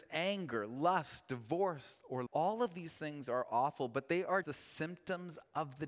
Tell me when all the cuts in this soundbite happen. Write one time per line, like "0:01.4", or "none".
0:02.3
0:04.4